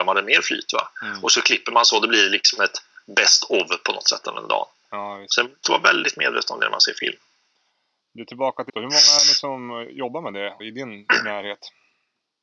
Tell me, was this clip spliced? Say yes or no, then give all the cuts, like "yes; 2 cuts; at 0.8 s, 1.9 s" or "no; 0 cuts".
yes; 3 cuts; at 5.6 s, 8.7 s, 10.6 s